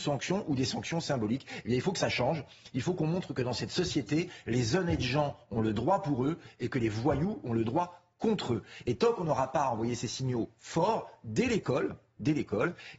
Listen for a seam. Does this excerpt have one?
no; 0 cuts

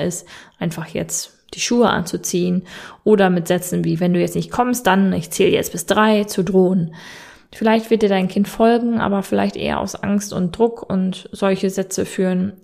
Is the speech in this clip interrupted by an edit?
no; 0 cuts

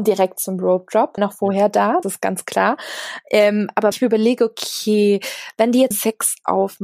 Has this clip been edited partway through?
yes; 4 cuts; at 1.2 s, 2.0 s, 3.9 s, 5.9 s

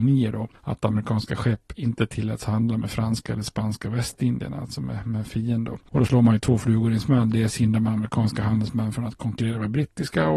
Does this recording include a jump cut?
no; 0 cuts

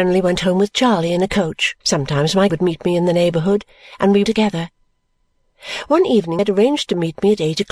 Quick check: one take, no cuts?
no; 4 cuts; at 1.8 s, 2.5 s, 4.2 s, 6.4 s

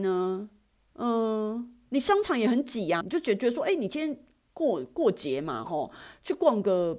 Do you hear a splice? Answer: yes; 1 cut; at 3.0 s

